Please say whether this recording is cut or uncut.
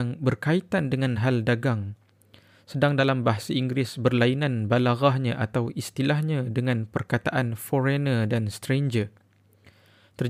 uncut